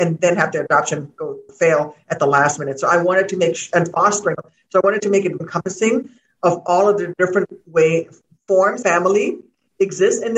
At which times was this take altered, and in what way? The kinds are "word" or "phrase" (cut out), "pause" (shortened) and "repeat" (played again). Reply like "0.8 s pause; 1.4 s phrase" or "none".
1.5 s word; 4.4 s word; 5.4 s word; 8.8 s word